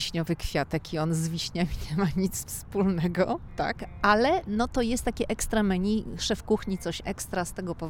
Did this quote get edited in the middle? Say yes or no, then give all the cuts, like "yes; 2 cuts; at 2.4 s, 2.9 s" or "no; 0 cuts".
no; 0 cuts